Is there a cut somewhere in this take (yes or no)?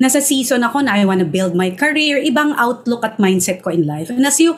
no